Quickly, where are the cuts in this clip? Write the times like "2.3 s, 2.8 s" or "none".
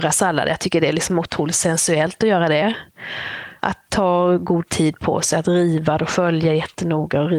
none